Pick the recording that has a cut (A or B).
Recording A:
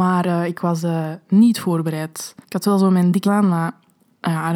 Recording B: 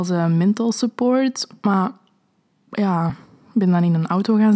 A